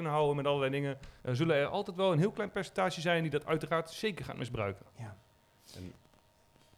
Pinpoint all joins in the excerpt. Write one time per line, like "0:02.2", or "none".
0:01.2
0:04.9